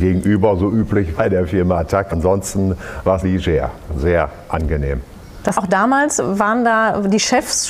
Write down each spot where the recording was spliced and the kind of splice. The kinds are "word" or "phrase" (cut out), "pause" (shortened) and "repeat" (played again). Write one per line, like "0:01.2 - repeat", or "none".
0:01.2 - word
0:02.1 - word
0:03.2 - word
0:03.9 - word
0:05.5 - word